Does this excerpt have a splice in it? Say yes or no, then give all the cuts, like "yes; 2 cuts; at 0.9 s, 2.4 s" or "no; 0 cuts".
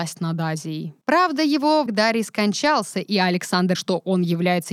yes; 3 cuts; at 1.0 s, 1.9 s, 3.7 s